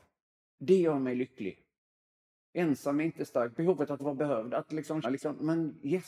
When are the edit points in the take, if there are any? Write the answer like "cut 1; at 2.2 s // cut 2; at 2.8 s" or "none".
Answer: cut 1; at 4.0 s // cut 2; at 4.7 s // cut 3; at 5.0 s